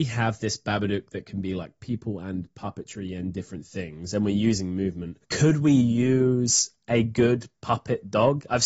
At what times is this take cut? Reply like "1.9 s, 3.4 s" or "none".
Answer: 5.2 s